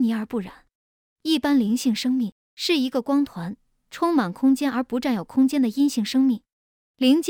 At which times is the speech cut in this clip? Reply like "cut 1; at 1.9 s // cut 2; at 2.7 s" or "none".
none

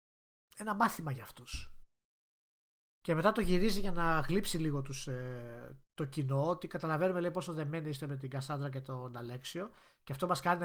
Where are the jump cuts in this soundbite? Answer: none

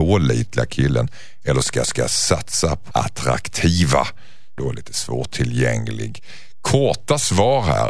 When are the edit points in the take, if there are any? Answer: cut 1; at 1.8 s // cut 2; at 2.9 s // cut 3; at 4.6 s

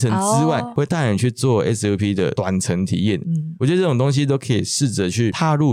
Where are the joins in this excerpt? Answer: none

